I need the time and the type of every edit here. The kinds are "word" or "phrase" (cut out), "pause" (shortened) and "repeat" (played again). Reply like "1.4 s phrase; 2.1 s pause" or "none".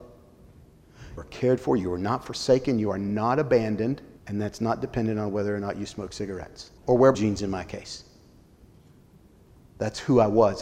1.2 s word; 4.2 s pause; 6.8 s pause; 7.1 s word